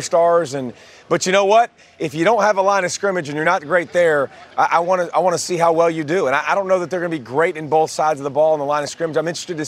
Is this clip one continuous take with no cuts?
yes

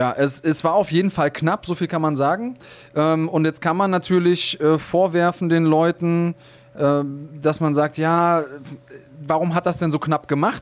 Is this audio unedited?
yes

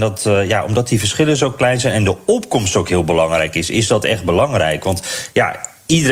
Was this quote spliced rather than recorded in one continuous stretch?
no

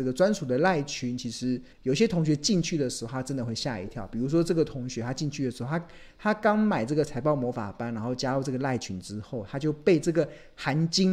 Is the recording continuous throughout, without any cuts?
no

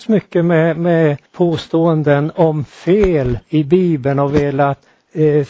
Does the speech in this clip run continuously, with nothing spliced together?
no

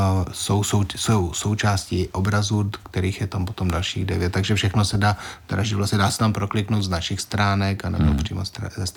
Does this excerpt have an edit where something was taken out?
no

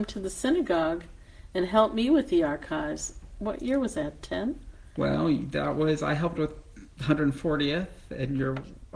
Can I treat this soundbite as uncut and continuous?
yes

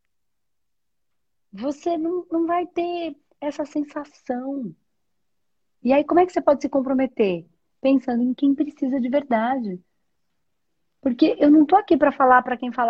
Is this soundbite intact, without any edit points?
yes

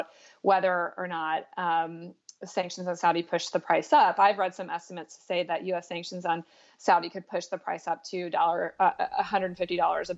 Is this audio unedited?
yes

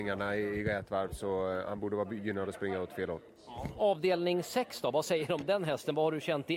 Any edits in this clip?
no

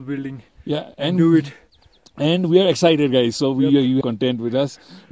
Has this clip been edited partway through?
yes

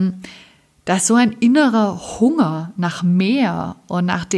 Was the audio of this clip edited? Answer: no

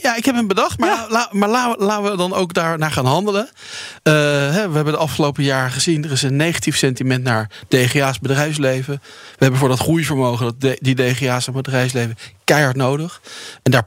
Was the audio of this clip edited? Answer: no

